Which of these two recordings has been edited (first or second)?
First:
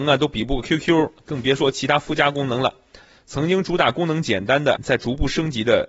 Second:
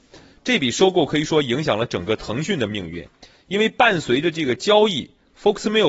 first